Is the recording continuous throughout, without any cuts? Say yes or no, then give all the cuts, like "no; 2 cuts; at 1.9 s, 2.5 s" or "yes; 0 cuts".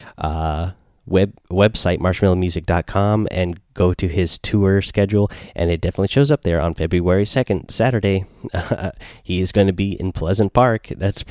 yes; 0 cuts